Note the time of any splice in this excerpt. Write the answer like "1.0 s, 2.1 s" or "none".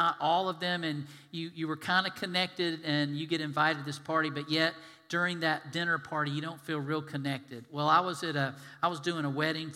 none